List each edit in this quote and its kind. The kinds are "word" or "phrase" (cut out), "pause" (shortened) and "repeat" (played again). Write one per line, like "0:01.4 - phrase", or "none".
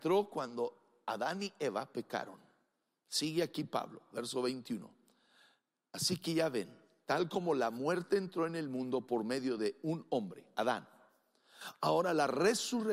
none